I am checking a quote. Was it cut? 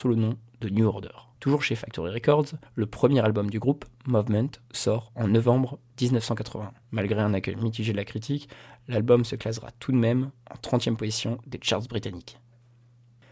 yes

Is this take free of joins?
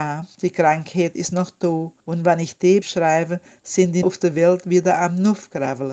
no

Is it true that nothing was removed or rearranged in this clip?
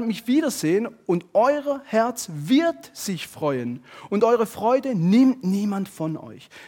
yes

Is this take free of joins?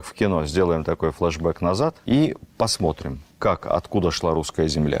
no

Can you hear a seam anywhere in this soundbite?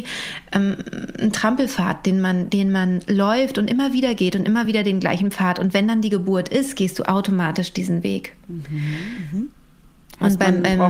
no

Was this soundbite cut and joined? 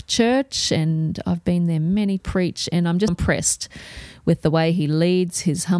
yes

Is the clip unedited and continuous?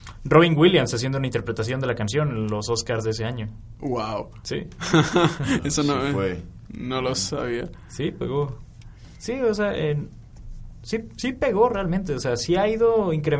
yes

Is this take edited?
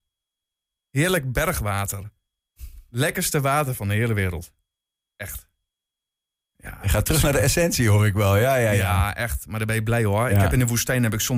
no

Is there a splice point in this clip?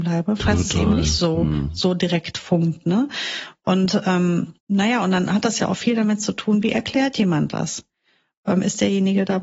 yes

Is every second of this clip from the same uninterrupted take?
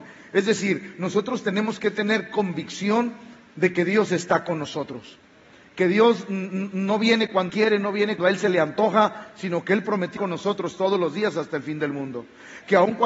no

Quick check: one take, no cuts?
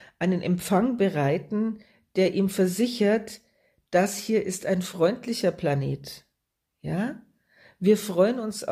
yes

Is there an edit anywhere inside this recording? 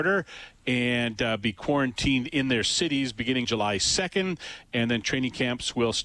yes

